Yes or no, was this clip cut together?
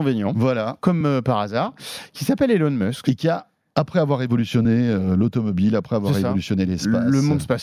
no